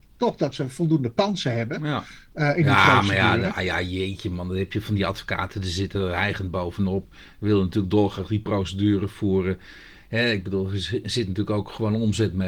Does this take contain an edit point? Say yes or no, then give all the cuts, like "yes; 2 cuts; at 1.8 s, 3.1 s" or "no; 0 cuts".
no; 0 cuts